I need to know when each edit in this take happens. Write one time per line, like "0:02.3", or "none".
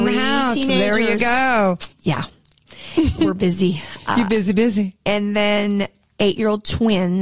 0:01.9